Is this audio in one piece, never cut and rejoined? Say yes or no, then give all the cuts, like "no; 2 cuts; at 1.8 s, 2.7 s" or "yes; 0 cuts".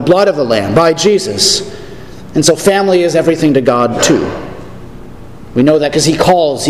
yes; 0 cuts